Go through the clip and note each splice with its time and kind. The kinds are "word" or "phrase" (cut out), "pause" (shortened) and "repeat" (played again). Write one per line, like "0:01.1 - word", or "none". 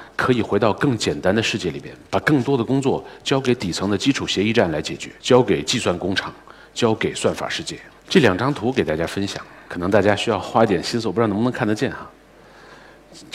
0:05.2 - pause
0:08.0 - pause
0:09.7 - word

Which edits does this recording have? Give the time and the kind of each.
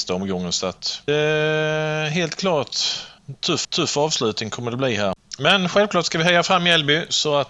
0:01.1 - phrase
0:03.2 - pause
0:03.6 - repeat

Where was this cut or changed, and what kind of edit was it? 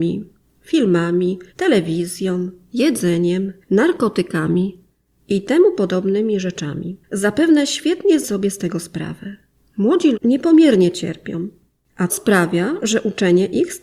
0:01.5 - pause
0:03.6 - pause
0:07.0 - pause
0:08.2 - word
0:10.1 - word
0:12.1 - word

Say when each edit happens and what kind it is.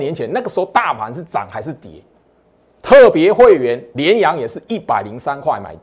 0:02.4 - pause

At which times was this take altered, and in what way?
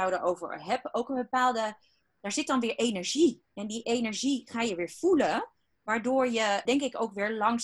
0:06.7 - word

